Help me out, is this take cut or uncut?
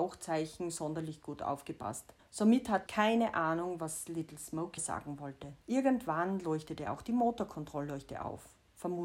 cut